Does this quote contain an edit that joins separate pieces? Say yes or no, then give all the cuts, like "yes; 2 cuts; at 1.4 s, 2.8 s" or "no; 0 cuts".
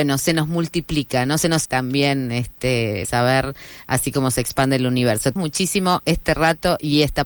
yes; 3 cuts; at 1.6 s, 3.0 s, 5.4 s